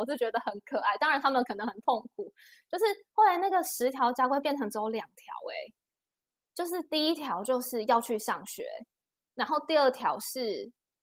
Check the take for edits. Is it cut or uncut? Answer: uncut